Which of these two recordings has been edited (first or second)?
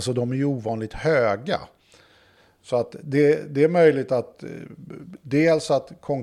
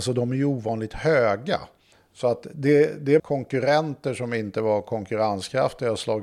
second